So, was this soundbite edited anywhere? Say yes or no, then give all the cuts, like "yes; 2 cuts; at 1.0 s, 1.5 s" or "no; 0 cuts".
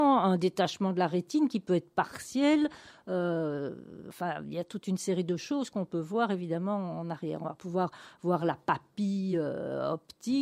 no; 0 cuts